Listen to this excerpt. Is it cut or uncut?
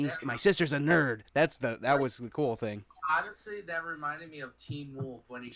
uncut